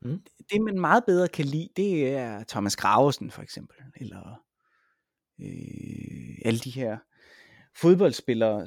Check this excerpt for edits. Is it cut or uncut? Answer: uncut